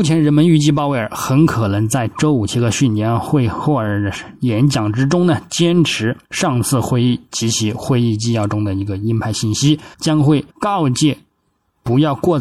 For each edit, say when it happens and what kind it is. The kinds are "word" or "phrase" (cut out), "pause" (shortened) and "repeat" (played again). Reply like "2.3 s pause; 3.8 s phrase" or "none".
6.2 s pause; 9.9 s pause; 10.5 s pause